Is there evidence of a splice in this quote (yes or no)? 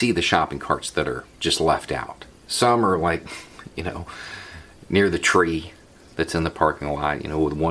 yes